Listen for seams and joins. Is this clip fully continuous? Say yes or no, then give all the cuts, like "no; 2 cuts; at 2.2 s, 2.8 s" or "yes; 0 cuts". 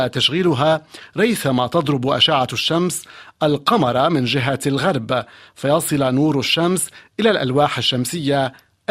yes; 0 cuts